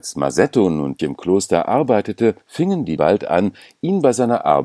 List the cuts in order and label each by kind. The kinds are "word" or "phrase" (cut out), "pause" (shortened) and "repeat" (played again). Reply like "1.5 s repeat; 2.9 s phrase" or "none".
1.0 s word; 2.4 s pause; 3.0 s word